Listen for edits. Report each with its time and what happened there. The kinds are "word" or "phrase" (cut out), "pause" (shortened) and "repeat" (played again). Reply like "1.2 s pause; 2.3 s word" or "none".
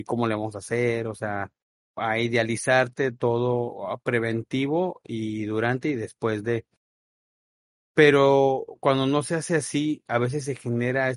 none